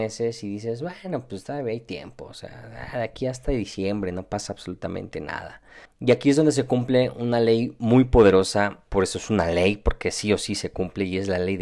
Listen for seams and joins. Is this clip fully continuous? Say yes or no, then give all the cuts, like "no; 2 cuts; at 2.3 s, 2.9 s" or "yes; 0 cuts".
no; 2 cuts; at 5.9 s, 8.9 s